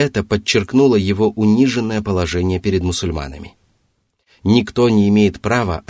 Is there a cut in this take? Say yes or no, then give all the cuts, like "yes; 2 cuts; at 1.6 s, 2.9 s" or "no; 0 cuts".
no; 0 cuts